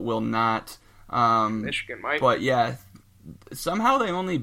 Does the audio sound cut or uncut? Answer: uncut